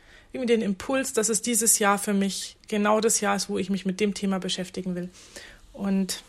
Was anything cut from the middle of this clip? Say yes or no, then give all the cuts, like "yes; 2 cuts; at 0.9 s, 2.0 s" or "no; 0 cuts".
no; 0 cuts